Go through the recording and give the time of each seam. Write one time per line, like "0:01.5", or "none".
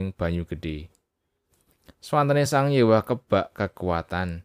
none